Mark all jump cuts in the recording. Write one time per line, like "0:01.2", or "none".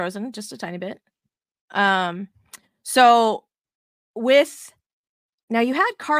none